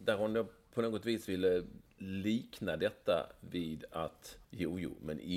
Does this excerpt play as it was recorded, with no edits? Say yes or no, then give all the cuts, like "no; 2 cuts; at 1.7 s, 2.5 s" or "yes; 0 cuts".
no; 2 cuts; at 1.9 s, 4.4 s